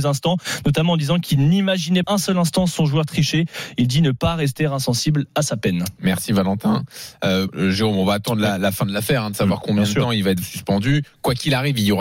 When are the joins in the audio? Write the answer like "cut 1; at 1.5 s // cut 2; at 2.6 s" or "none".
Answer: cut 1; at 2.0 s // cut 2; at 7.5 s // cut 3; at 9.6 s // cut 4; at 10.4 s